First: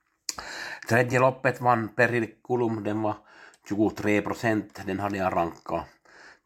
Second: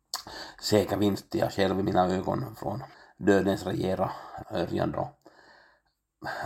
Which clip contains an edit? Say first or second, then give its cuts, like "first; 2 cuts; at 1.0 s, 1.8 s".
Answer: second; 4 cuts; at 1.3 s, 2.9 s, 4.4 s, 4.9 s